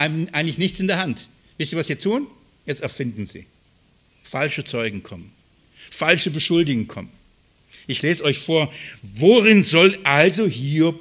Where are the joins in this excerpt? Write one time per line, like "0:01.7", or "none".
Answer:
none